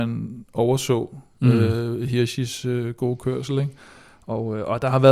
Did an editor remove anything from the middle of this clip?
no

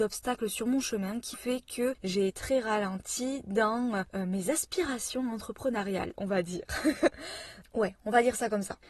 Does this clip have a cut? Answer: yes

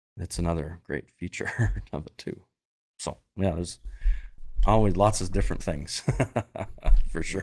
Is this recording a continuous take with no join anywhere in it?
no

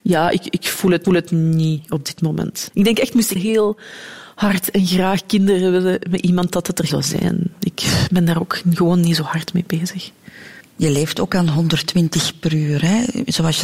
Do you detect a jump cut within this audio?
yes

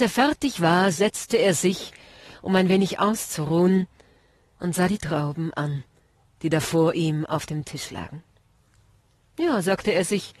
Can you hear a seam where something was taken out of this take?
no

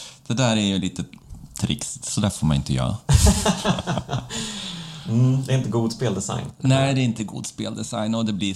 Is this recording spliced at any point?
no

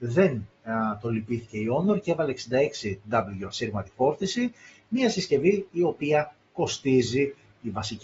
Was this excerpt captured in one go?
yes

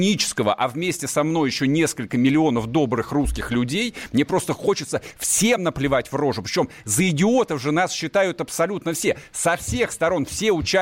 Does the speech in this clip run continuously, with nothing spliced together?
yes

